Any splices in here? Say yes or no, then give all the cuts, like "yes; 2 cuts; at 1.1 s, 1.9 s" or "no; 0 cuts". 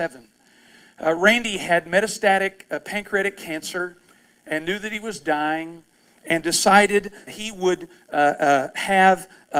yes; 1 cut; at 7.3 s